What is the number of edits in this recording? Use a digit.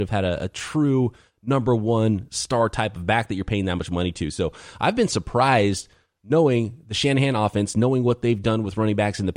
0